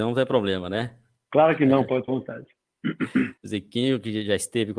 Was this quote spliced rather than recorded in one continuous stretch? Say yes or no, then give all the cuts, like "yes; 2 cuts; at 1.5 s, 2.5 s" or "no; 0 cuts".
yes; 2 cuts; at 2.1 s, 3.4 s